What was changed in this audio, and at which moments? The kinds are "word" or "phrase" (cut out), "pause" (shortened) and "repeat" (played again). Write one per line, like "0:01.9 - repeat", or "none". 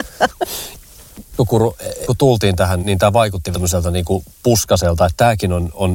0:01.4 - word
0:02.1 - word
0:02.8 - word
0:03.5 - word